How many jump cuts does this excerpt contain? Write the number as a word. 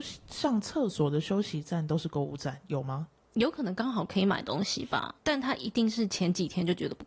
one